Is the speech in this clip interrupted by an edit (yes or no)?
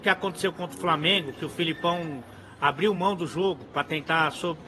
no